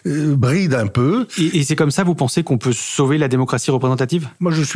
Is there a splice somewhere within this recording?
no; 0 cuts

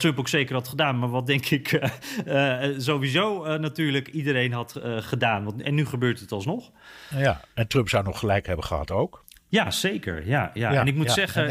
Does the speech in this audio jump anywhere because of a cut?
no; 0 cuts

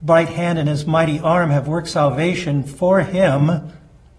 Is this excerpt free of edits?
yes; 0 cuts

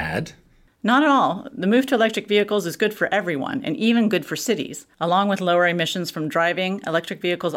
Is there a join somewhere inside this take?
yes; 1 cut; at 4.9 s

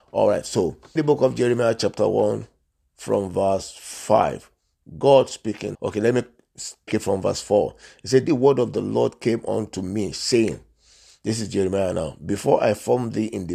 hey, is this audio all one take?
no; 4 cuts; at 1.0 s, 5.7 s, 6.9 s, 8.3 s

